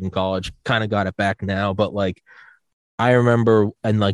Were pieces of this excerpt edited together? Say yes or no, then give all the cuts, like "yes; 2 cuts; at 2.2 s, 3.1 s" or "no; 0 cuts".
no; 0 cuts